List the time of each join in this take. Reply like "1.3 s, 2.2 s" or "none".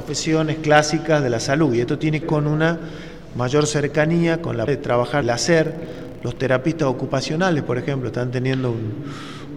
2.2 s, 4.7 s, 5.2 s